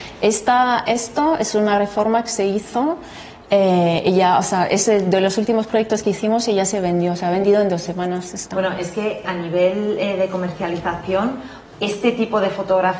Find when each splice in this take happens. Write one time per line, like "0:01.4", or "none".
0:09.2

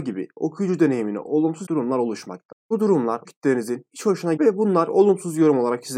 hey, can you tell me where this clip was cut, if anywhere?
0:01.7
0:03.3
0:04.4

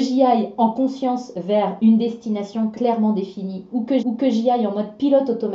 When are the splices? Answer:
0:02.7
0:04.0

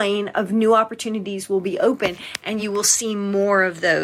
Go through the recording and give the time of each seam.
none

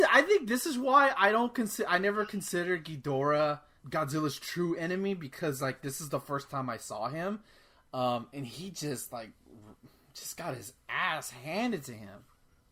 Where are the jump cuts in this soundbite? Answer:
0:03.8

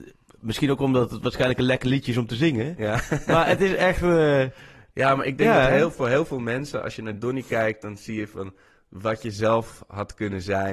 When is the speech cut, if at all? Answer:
none

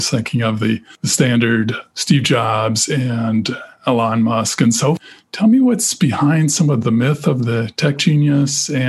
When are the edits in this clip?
none

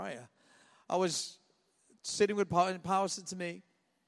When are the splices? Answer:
none

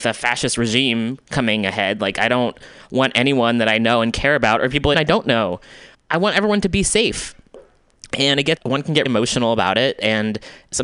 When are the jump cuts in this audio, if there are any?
0:04.9
0:05.9
0:08.6
0:09.1

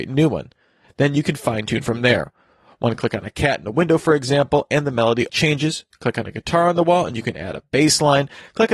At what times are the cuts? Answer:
0:05.3

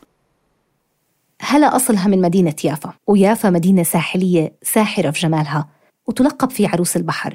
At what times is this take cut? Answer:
0:03.0

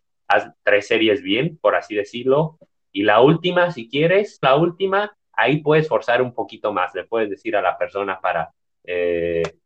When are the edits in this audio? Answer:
0:04.4

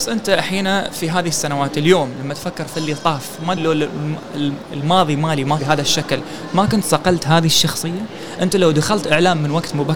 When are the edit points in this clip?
0:03.6
0:05.6

